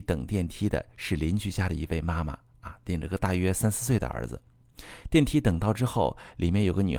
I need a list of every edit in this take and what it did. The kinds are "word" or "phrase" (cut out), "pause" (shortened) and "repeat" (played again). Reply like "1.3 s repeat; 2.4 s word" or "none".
none